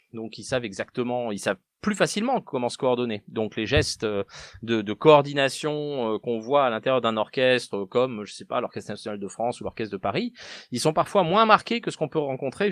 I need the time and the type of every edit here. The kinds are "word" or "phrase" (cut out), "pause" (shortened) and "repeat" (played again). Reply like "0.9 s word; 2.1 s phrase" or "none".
none